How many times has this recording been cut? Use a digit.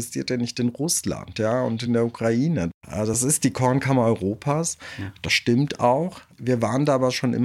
0